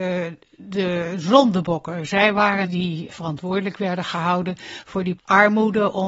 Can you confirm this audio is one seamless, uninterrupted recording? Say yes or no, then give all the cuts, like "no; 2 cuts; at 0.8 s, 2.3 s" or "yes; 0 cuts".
no; 3 cuts; at 2.6 s, 3.1 s, 5.2 s